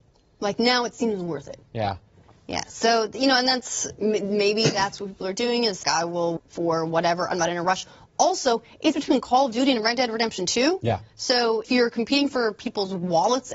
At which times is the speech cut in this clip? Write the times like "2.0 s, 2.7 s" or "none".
5.8 s, 6.4 s, 8.9 s, 11.6 s